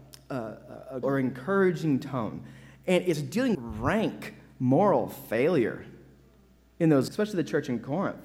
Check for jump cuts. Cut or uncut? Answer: cut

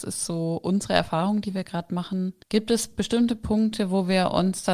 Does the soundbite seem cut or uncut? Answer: cut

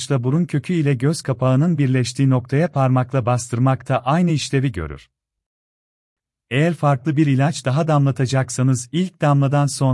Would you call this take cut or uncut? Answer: uncut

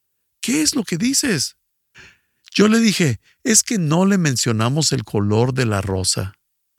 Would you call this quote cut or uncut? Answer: uncut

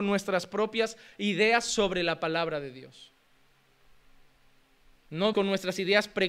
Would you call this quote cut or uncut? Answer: cut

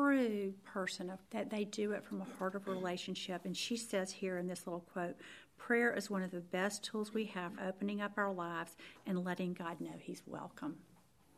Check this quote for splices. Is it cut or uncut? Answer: cut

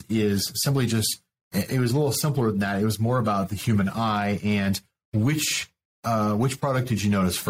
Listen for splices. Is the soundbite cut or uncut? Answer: uncut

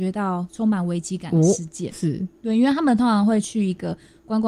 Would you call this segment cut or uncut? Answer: cut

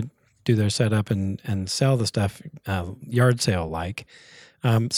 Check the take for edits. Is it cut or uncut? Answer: uncut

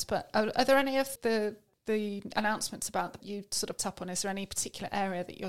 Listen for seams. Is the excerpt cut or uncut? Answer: cut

